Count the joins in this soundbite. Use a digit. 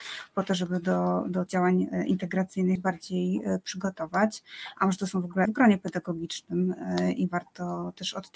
3